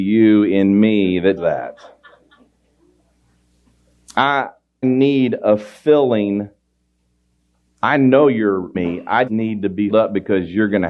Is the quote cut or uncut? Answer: cut